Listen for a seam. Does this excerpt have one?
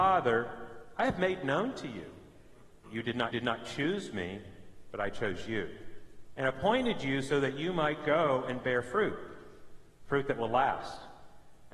yes; 1 cut; at 3.3 s

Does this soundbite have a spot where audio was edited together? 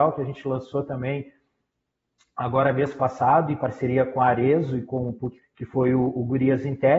yes; 1 cut; at 5.4 s

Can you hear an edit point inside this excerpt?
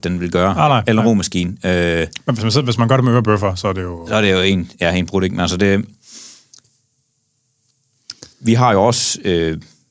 yes; 1 cut; at 8.3 s

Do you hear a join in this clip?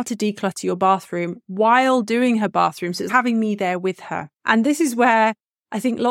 yes; 2 cuts; at 3.1 s, 4.3 s

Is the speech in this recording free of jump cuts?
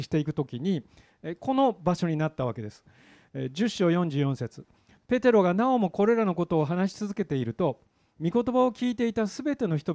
yes; 0 cuts

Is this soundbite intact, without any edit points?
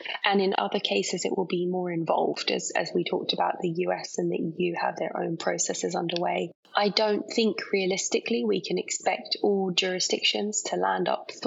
yes; 0 cuts

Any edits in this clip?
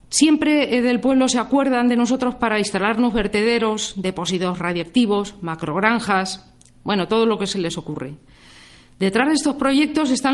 no; 0 cuts

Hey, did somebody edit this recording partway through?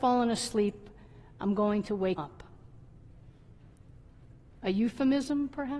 yes; 1 cut; at 2.2 s

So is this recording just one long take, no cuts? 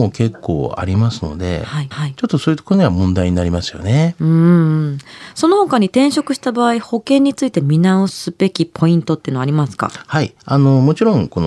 no; 2 cuts; at 1.9 s, 10.4 s

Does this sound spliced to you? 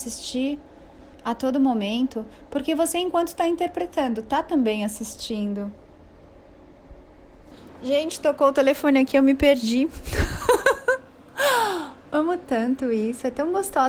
yes; 1 cut; at 1.1 s

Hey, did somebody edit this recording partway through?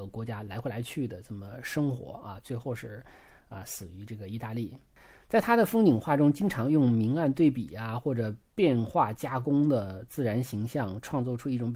no; 0 cuts

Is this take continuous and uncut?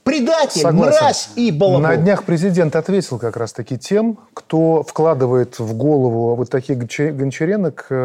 yes; 0 cuts

